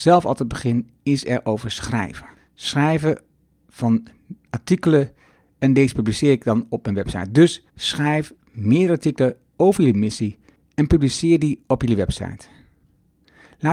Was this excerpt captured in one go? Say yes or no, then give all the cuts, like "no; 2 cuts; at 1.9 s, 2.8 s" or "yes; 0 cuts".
no; 2 cuts; at 2.3 s, 7.7 s